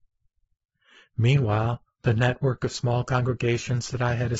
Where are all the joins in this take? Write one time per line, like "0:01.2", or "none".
none